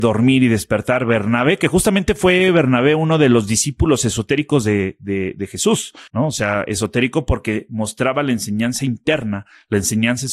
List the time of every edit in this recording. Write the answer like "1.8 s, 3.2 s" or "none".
6.1 s

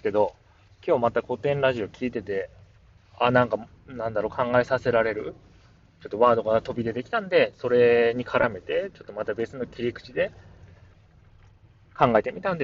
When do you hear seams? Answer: 3.0 s

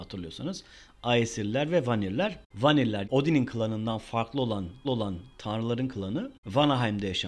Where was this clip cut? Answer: 3.0 s, 4.8 s

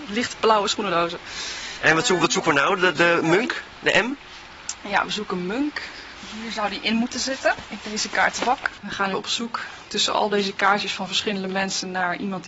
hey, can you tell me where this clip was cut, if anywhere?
2.9 s, 9.1 s

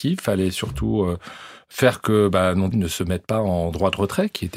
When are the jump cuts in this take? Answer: 2.7 s

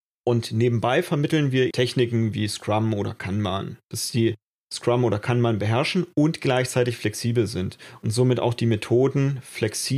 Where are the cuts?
1.7 s, 3.8 s, 4.7 s

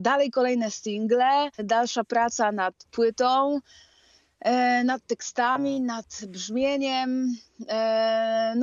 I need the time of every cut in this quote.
1.5 s

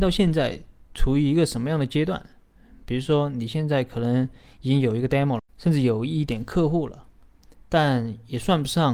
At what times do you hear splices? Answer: 5.4 s, 7.6 s

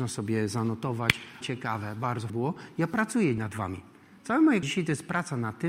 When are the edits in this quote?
1.4 s, 2.3 s, 3.4 s, 4.6 s

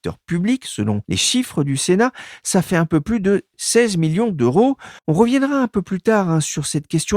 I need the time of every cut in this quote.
1.0 s, 5.0 s

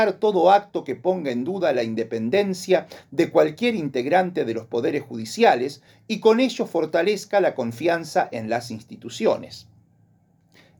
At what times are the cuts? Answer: none

